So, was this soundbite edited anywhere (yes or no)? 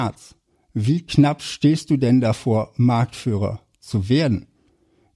no